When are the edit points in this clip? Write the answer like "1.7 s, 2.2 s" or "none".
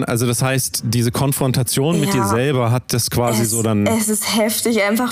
none